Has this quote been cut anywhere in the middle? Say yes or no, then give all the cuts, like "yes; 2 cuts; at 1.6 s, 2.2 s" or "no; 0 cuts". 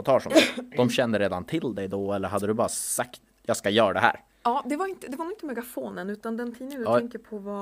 no; 0 cuts